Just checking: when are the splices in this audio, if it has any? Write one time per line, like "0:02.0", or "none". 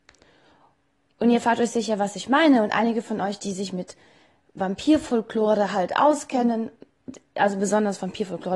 none